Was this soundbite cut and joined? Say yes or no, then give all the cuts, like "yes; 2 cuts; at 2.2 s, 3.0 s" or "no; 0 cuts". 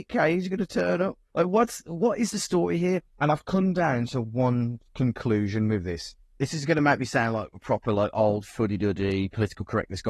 yes; 3 cuts; at 1.3 s, 3.1 s, 6.2 s